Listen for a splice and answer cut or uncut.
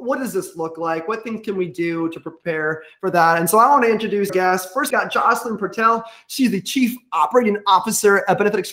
cut